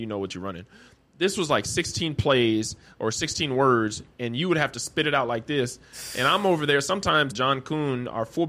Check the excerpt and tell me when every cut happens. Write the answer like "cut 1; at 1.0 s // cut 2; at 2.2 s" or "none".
cut 1; at 7.3 s